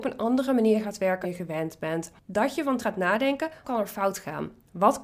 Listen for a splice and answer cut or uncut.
cut